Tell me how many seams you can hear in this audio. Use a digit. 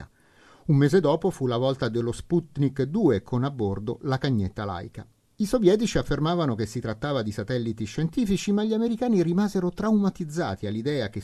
0